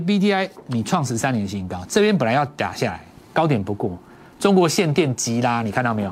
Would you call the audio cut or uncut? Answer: uncut